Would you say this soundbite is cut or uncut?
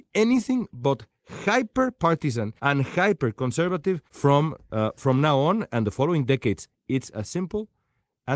cut